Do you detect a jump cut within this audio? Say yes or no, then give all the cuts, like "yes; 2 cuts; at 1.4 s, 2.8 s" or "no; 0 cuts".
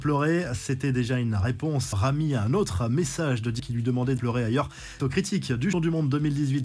yes; 5 cuts; at 1.9 s, 3.6 s, 4.2 s, 5.0 s, 5.7 s